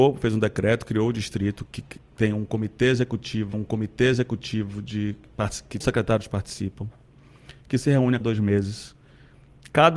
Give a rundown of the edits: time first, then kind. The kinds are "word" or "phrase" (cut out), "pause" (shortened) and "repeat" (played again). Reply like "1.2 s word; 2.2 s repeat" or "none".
1.7 s word; 3.5 s repeat; 5.8 s word; 8.2 s word